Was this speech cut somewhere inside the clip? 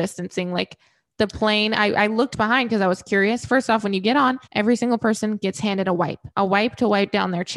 yes; 2 cuts; at 4.4 s, 6.3 s

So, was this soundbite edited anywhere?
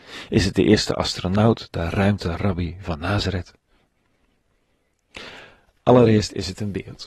no; 0 cuts

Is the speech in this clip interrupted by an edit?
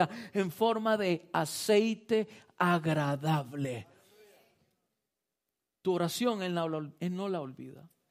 no; 0 cuts

